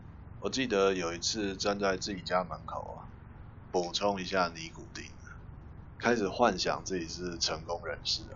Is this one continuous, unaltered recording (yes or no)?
yes